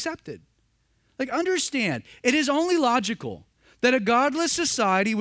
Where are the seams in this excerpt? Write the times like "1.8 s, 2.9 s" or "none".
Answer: none

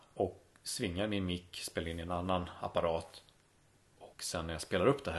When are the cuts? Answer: 4.1 s

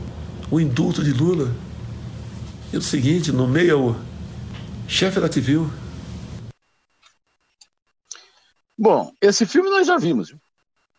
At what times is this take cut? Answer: 2.8 s, 5.3 s, 9.1 s

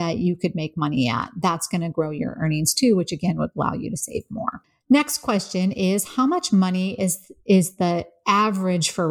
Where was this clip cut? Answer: none

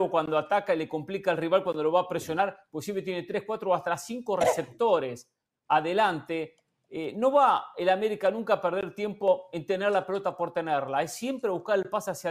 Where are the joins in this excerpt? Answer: none

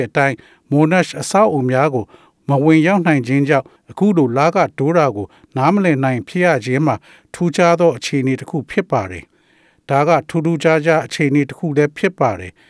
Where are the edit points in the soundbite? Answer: none

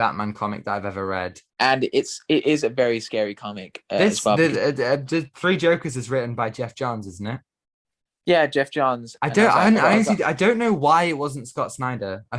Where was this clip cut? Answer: 1.5 s

